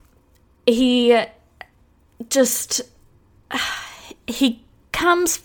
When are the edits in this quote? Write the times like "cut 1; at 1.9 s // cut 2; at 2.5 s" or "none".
none